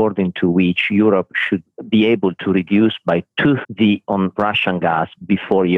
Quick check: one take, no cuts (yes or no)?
no